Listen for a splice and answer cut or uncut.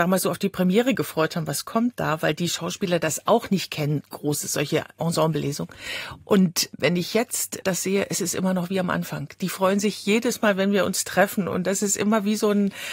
uncut